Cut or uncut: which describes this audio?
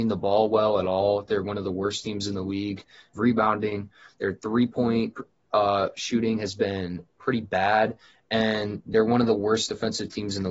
cut